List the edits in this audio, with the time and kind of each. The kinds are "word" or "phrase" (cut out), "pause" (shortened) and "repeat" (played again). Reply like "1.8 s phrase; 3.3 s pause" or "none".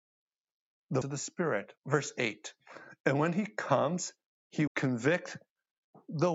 1.0 s word; 1.8 s pause; 4.7 s word